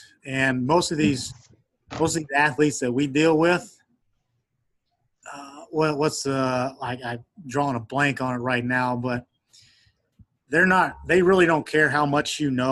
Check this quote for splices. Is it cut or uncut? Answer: uncut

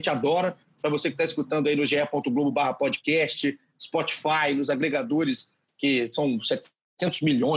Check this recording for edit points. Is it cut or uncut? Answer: uncut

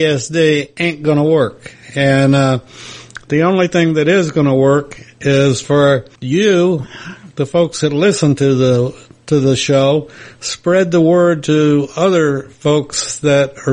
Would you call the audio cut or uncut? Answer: cut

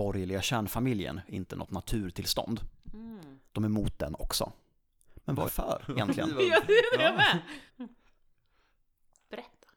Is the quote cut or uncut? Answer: cut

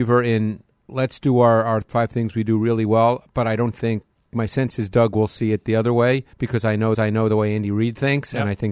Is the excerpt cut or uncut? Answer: cut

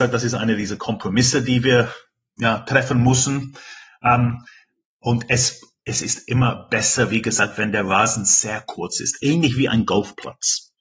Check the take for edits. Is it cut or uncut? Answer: uncut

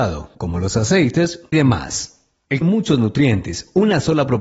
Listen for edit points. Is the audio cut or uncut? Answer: cut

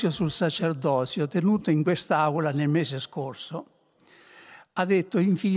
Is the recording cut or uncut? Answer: uncut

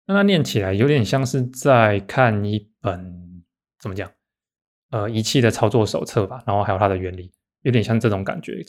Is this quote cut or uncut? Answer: uncut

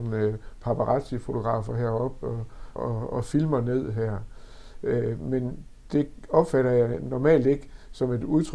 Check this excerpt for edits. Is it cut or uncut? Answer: cut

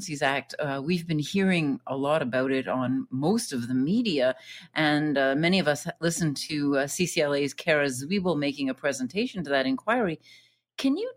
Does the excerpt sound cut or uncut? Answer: uncut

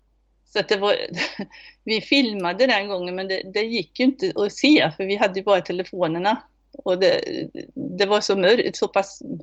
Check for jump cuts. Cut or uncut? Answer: uncut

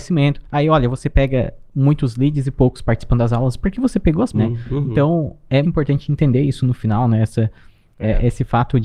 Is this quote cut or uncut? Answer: cut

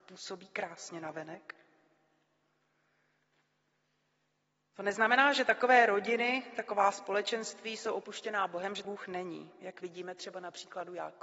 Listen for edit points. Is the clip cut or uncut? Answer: cut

